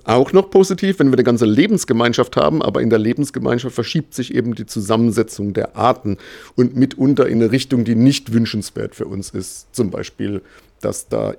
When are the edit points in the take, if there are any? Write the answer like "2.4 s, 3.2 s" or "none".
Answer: none